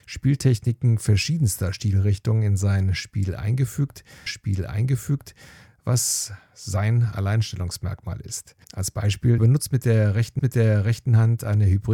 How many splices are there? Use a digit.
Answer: 4